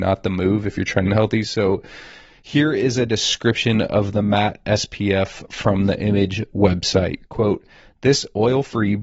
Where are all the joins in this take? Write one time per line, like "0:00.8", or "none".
0:01.0

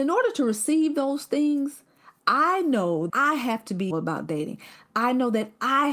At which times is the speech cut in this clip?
0:03.1
0:03.9

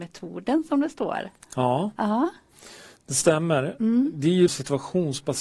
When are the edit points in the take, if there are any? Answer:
0:04.5

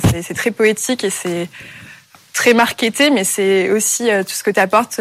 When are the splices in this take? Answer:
none

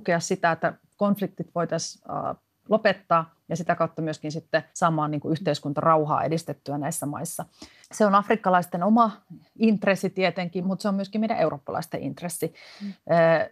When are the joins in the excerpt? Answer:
0:04.7
0:07.8
0:10.6

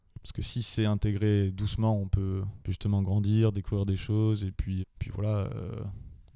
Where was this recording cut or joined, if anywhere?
0:02.6
0:04.8

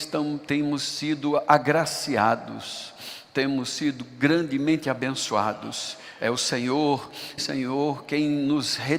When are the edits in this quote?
0:07.4

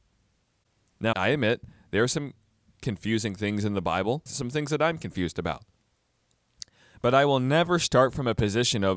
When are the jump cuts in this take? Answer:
0:01.1
0:04.3

